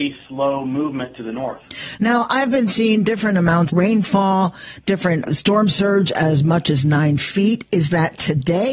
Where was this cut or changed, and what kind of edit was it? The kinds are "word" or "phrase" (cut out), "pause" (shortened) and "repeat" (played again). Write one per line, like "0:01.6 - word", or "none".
0:03.7 - word
0:05.2 - word